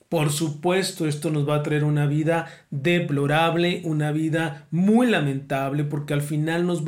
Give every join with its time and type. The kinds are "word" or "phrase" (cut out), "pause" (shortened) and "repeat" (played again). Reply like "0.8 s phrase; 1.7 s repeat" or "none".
none